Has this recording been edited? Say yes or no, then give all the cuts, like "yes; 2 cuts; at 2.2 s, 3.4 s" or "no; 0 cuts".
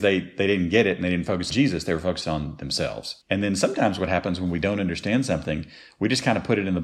yes; 2 cuts; at 1.5 s, 3.2 s